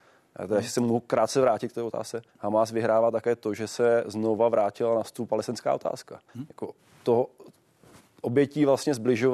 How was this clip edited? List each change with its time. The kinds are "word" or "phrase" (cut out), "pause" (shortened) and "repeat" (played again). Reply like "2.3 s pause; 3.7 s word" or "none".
2.3 s pause; 6.3 s pause; 6.8 s pause